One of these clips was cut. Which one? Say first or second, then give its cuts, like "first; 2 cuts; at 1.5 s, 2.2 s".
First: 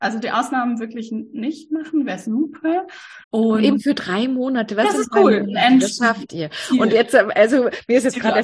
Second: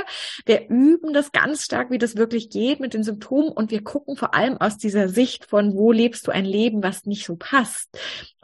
first; 1 cut; at 3.2 s